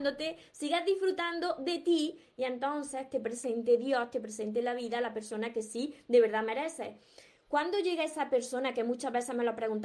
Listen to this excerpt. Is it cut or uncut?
uncut